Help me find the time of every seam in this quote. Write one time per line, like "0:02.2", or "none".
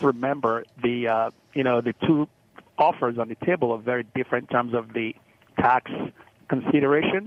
none

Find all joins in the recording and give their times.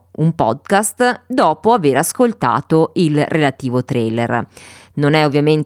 none

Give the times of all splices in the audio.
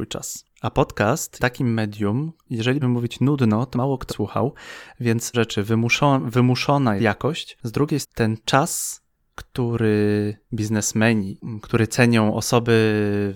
0:01.4
0:02.5
0:02.8
0:03.7
0:04.1
0:05.3
0:07.0
0:08.0
0:10.5

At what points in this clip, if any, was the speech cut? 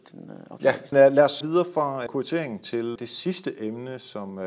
0:00.9
0:01.4
0:02.1
0:03.0

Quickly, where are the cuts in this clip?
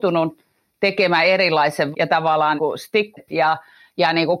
0:01.9
0:02.6
0:03.2

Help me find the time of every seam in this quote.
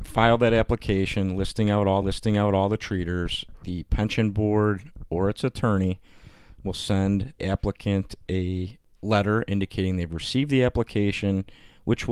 0:02.0
0:07.4

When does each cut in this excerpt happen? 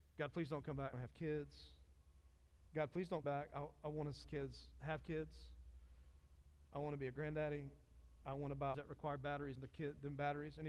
0:00.9
0:03.2
0:04.2
0:08.7
0:09.6

